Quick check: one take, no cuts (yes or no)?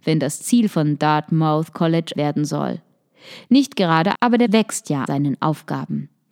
no